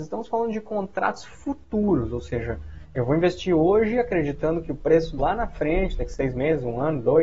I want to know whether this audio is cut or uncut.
cut